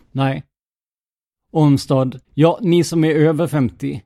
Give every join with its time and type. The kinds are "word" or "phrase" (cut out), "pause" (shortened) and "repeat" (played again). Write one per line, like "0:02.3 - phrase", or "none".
0:02.2 - pause